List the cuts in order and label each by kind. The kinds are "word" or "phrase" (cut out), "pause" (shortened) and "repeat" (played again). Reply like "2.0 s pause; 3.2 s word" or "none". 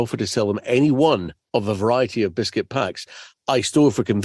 none